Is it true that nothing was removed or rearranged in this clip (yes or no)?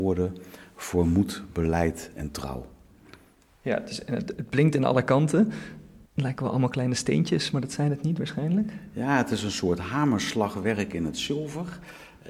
no